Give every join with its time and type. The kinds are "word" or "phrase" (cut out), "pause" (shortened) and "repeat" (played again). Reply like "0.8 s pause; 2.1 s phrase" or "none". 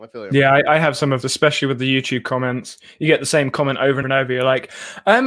1.2 s word; 4.0 s word